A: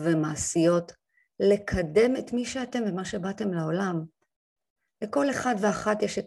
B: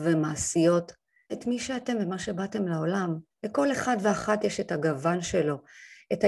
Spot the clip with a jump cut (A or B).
B